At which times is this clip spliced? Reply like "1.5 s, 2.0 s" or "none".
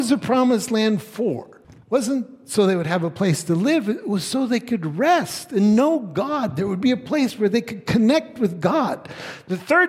1.6 s